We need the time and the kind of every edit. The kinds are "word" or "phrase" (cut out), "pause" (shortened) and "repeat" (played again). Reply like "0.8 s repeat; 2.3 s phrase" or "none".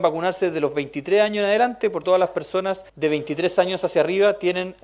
2.0 s word; 2.9 s pause